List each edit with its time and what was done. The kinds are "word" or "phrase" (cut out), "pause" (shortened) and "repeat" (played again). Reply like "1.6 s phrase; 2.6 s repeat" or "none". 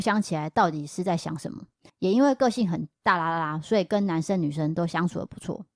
none